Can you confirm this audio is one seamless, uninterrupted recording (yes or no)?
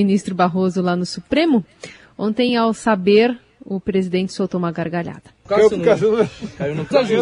yes